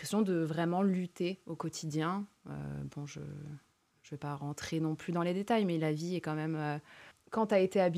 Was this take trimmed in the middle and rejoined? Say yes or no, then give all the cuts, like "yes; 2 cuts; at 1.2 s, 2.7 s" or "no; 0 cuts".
no; 0 cuts